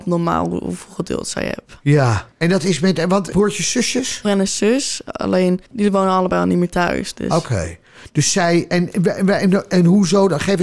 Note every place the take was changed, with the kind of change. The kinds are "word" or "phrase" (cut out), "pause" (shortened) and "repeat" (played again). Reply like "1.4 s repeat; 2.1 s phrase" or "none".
2.3 s pause; 3.3 s phrase; 4.2 s phrase; 5.7 s pause